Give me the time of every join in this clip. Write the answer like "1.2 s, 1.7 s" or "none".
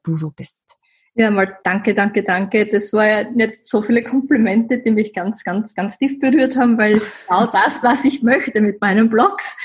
none